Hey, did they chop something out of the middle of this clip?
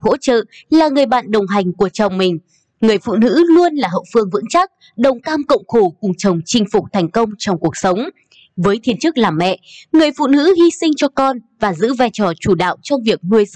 no; 0 cuts

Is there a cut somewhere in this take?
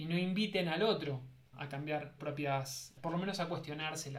yes; 3 cuts; at 1.5 s, 2.2 s, 3.0 s

